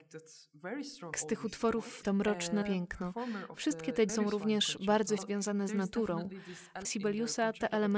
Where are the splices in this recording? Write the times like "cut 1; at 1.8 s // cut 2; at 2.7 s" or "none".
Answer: cut 1; at 1.1 s // cut 2; at 2.0 s // cut 3; at 2.6 s // cut 4; at 4.1 s // cut 5; at 5.2 s // cut 6; at 6.8 s